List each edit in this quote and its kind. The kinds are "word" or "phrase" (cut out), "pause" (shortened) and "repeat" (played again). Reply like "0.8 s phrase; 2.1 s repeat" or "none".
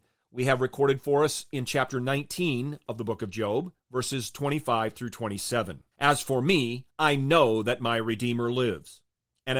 3.8 s pause; 5.9 s pause; 6.9 s pause